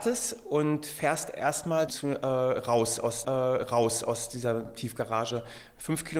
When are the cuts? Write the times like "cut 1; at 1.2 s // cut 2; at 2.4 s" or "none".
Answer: cut 1; at 1.9 s // cut 2; at 3.2 s